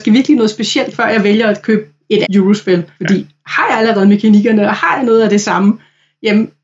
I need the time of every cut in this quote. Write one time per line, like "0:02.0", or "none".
0:00.9
0:02.2